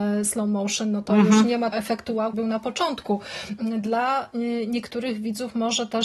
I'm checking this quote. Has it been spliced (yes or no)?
yes